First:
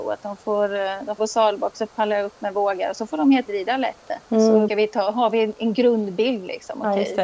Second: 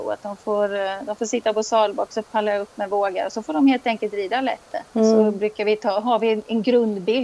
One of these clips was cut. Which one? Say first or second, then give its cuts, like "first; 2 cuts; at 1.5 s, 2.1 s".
first; 3 cuts; at 1.2 s, 3.5 s, 4.7 s